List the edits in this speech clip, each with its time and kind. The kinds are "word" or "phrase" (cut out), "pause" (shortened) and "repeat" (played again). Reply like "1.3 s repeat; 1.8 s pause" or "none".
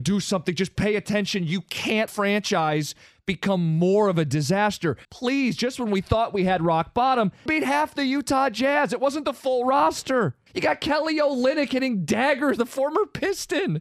2.1 s phrase; 5.0 s pause; 7.5 s phrase; 10.5 s pause; 12.6 s word